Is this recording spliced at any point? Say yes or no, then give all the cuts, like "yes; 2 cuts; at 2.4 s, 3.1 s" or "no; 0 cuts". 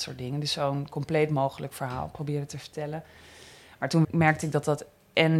yes; 1 cut; at 4.0 s